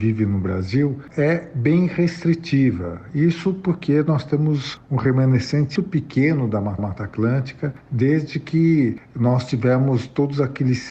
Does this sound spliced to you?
yes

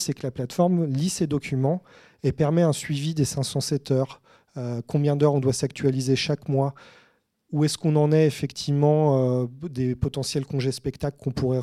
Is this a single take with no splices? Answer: yes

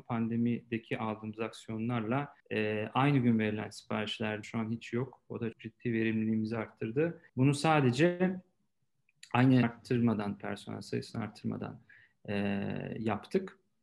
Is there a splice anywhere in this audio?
yes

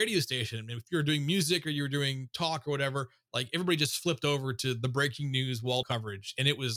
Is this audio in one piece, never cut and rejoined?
no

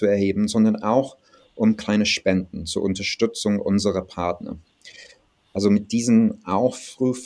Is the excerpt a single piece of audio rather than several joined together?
yes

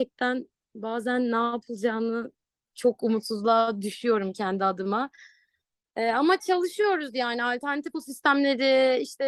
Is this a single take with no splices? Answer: no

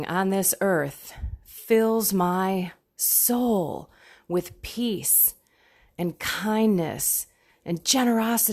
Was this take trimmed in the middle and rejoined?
no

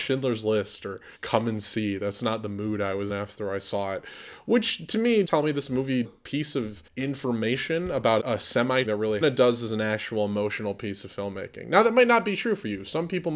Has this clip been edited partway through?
yes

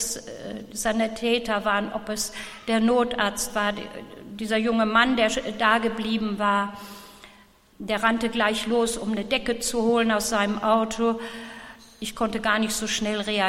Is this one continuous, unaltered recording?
yes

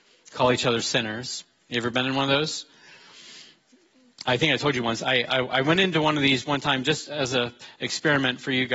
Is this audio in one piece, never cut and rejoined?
yes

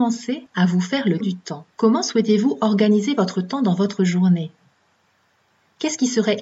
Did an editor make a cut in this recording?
yes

